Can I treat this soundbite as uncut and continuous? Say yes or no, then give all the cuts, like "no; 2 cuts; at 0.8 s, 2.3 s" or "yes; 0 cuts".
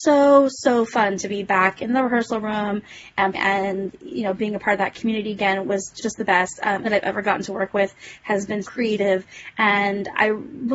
no; 4 cuts; at 3.3 s, 6.0 s, 6.8 s, 8.6 s